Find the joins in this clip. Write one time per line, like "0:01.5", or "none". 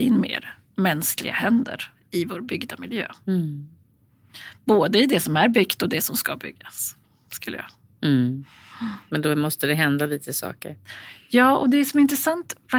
none